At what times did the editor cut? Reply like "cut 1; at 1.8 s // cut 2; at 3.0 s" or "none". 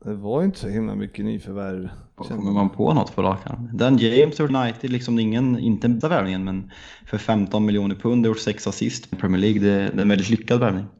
cut 1; at 4.5 s // cut 2; at 6.0 s // cut 3; at 9.1 s